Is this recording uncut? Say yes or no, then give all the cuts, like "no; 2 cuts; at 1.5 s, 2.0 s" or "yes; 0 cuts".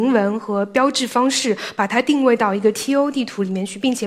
yes; 0 cuts